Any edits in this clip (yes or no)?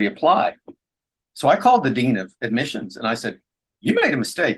yes